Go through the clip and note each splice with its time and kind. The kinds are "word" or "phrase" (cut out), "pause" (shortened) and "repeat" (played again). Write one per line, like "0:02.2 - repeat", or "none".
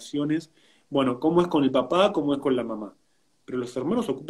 none